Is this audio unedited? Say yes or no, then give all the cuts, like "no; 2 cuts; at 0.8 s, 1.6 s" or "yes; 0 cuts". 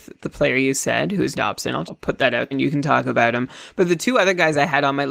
no; 3 cuts; at 1.3 s, 1.9 s, 2.5 s